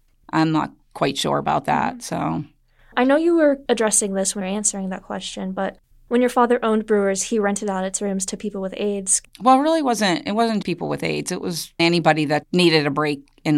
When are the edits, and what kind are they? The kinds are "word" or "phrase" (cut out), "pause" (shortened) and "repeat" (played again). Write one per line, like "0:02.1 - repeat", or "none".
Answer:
0:04.4 - word
0:10.6 - word
0:11.8 - word
0:12.4 - word